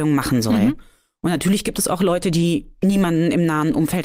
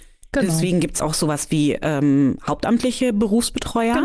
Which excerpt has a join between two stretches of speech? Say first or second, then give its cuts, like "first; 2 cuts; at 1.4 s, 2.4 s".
second; 1 cut; at 1.0 s